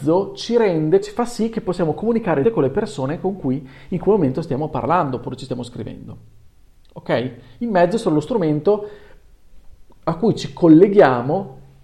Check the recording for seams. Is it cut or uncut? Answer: cut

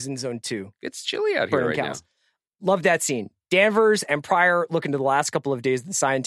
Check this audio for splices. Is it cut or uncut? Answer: uncut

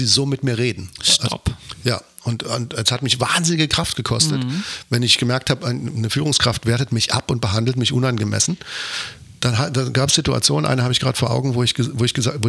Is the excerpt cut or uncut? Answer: uncut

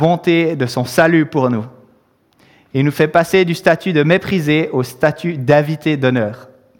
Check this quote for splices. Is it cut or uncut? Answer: uncut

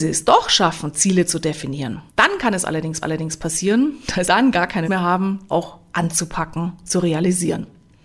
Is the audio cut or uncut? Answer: cut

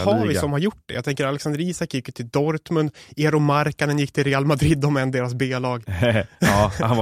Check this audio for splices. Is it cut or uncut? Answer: uncut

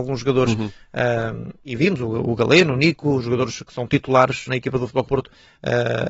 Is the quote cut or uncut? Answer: cut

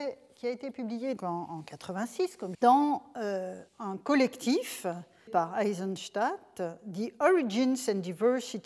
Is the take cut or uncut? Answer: cut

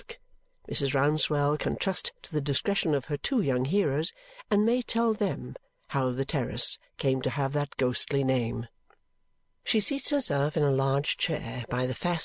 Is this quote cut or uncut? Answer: uncut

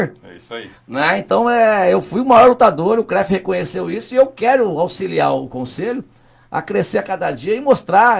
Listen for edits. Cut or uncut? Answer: uncut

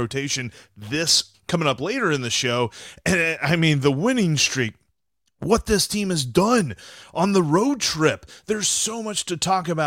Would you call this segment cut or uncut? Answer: cut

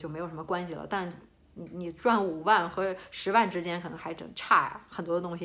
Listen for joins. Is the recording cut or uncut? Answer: uncut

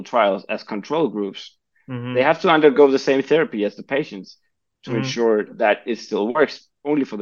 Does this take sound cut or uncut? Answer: uncut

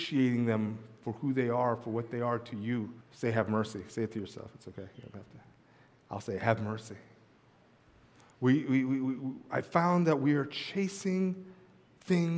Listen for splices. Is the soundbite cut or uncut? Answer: cut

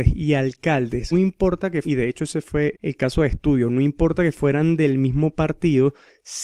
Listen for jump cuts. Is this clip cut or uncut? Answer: cut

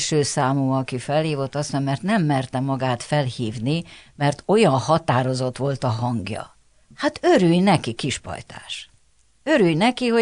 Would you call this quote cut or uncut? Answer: cut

